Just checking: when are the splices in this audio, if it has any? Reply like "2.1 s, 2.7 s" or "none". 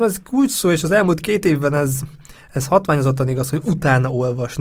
none